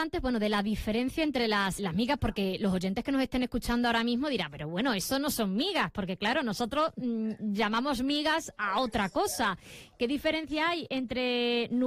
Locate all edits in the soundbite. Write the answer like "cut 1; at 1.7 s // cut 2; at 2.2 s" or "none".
cut 1; at 1.8 s